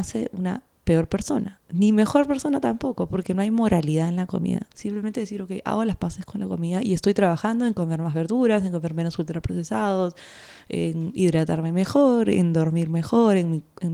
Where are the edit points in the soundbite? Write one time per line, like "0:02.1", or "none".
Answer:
0:01.6
0:04.7